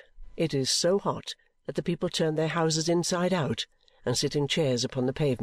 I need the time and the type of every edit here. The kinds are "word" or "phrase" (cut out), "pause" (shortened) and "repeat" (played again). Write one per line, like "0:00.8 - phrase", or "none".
none